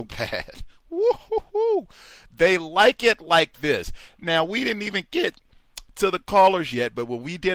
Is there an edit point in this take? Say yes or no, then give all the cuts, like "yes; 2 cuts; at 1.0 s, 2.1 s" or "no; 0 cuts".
no; 0 cuts